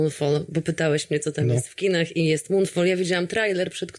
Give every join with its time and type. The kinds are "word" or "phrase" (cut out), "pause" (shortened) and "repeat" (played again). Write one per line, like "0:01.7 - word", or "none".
none